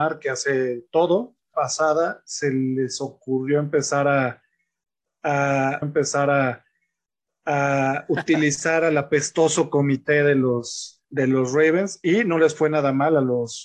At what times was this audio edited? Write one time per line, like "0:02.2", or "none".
0:01.5
0:05.8
0:11.0